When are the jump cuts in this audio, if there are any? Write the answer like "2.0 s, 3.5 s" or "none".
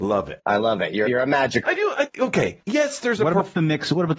1.0 s, 1.6 s, 2.1 s, 2.6 s